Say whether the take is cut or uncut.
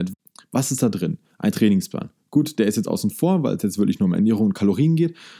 uncut